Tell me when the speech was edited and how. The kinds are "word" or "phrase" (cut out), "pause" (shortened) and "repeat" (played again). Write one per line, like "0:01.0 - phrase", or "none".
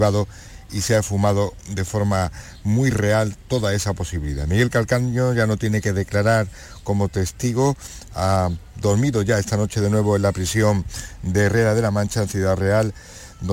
none

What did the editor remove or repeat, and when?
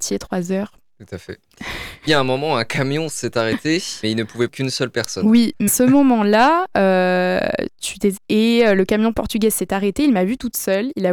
0:02.1 - word
0:04.0 - word
0:04.5 - word
0:05.7 - word
0:08.2 - word

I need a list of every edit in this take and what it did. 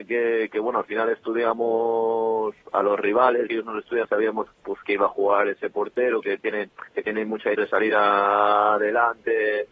0:02.6 - pause
0:03.5 - word
0:04.0 - phrase
0:04.8 - word
0:06.9 - pause
0:07.5 - phrase

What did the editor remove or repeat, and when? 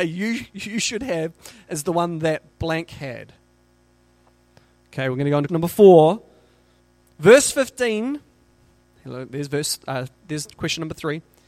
0:02.5 - word
0:05.5 - word

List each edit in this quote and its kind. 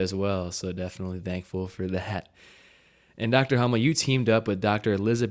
none

